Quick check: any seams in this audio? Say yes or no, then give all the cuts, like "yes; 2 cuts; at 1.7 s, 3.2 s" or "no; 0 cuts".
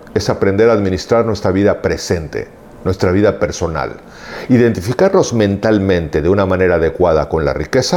no; 0 cuts